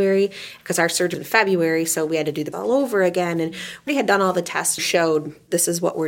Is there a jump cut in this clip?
yes; 4 cuts; at 1.1 s, 2.5 s, 3.9 s, 4.8 s

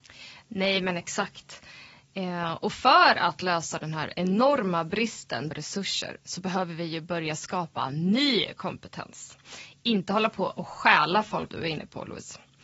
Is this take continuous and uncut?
no; 2 cuts; at 5.5 s, 11.5 s

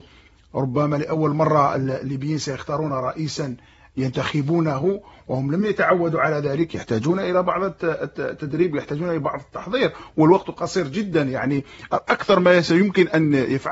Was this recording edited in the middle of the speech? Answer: no; 0 cuts

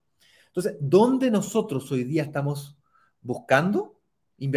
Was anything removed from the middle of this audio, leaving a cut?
no; 0 cuts

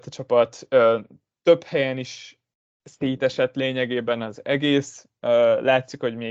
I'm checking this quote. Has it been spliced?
no; 0 cuts

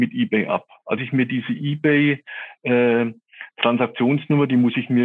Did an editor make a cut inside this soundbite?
yes; 1 cut; at 1.0 s

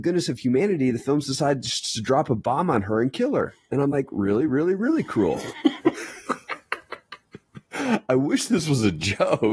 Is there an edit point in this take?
no; 0 cuts

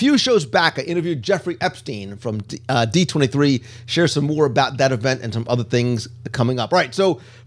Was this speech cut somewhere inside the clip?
no; 0 cuts

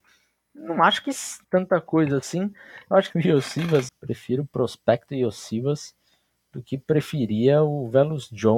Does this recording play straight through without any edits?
no; 3 cuts; at 1.4 s, 3.1 s, 3.9 s

